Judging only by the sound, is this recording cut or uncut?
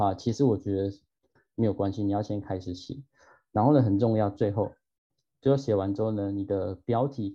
uncut